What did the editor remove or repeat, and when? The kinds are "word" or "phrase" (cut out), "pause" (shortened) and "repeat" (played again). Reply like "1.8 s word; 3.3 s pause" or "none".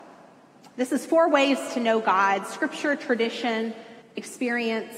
4.0 s pause